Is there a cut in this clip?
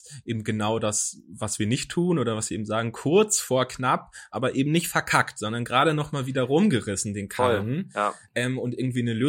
no; 0 cuts

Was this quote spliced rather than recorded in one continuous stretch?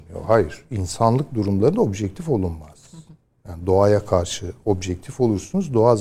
no; 0 cuts

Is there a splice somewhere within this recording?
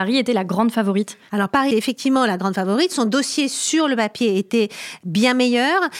yes; 1 cut; at 1.7 s

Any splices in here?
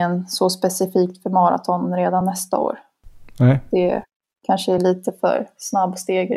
no; 0 cuts

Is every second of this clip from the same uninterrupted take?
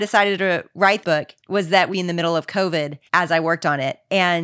no; 4 cuts; at 1.0 s, 1.4 s, 1.9 s, 3.1 s

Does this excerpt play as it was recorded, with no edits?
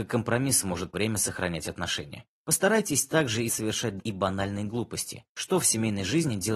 no; 5 cuts; at 0.9 s, 2.3 s, 3.5 s, 4.0 s, 5.3 s

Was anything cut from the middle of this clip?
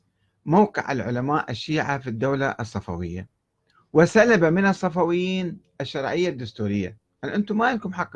no; 0 cuts

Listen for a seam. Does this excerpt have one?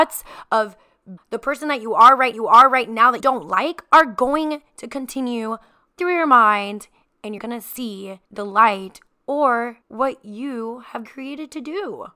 yes; 8 cuts; at 1.2 s, 2.3 s, 3.2 s, 6.0 s, 7.4 s, 8.2 s, 9.8 s, 11.1 s

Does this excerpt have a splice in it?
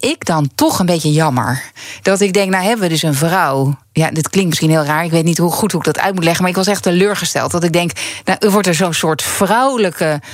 yes; 1 cut; at 3.8 s

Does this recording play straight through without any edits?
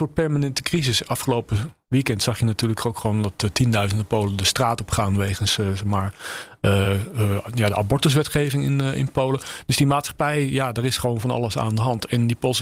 yes; 0 cuts

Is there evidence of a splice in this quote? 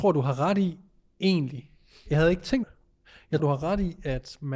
yes; 2 cuts; at 2.6 s, 3.4 s

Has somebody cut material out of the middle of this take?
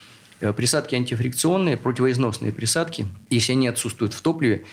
yes; 1 cut; at 3.2 s

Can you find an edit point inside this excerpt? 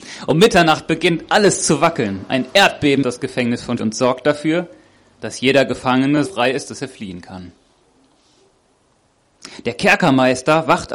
yes; 3 cuts; at 3.0 s, 3.8 s, 6.3 s

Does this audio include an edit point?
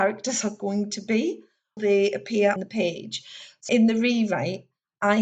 yes; 3 cuts; at 1.8 s, 2.6 s, 3.7 s

